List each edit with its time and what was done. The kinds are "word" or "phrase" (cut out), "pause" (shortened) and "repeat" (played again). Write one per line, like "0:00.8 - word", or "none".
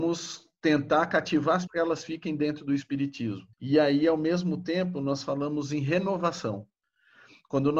0:01.7 - phrase
0:03.5 - pause